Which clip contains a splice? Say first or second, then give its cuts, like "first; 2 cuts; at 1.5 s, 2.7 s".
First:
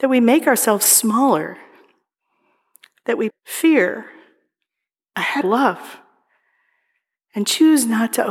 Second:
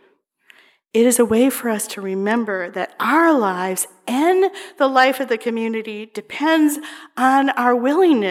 first; 2 cuts; at 3.3 s, 5.4 s